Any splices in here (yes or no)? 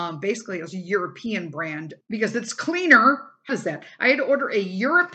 yes